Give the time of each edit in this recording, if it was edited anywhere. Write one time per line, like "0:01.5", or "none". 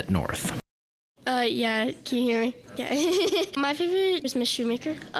0:03.6
0:04.2